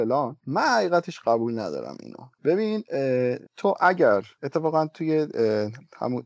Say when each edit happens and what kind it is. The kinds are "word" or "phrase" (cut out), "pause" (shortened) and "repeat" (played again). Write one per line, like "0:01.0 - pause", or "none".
0:03.5 - pause